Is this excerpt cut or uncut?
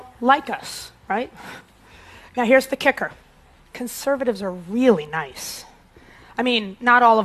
cut